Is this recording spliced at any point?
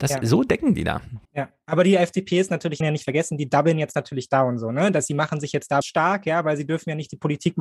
yes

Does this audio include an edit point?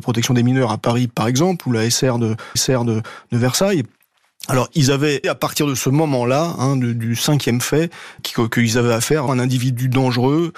yes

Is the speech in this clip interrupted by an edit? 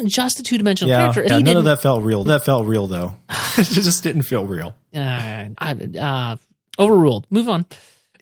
yes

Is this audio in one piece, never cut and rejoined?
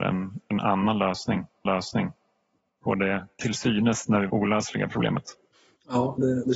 no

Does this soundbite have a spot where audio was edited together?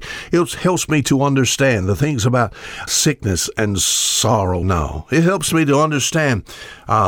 yes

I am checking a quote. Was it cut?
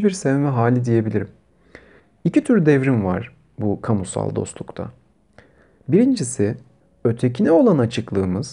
no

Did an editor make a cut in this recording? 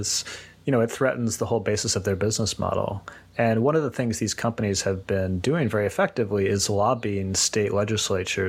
no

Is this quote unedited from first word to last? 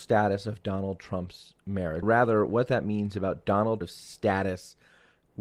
no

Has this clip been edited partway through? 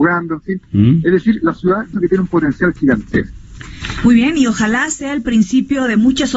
yes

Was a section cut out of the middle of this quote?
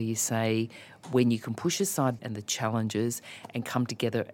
yes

